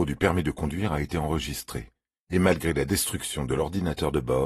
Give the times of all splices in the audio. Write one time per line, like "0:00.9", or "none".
none

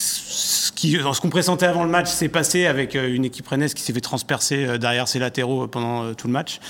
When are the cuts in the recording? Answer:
none

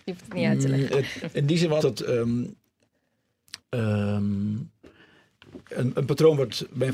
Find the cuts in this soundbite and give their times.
0:01.2
0:01.8
0:05.6

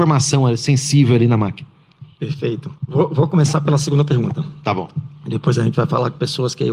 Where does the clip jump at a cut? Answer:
0:02.8

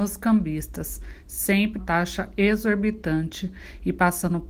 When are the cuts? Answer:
0:01.8

